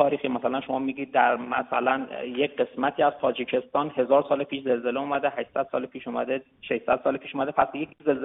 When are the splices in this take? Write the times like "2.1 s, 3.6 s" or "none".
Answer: none